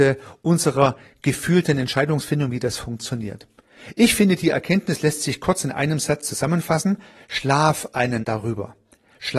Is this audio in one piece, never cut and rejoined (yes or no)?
no